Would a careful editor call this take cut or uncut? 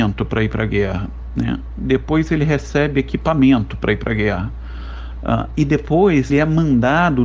cut